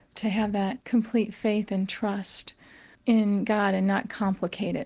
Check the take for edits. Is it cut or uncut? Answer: uncut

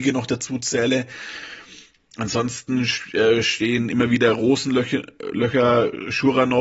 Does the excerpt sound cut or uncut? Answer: uncut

